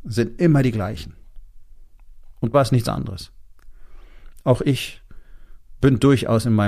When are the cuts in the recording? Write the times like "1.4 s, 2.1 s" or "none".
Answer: 2.5 s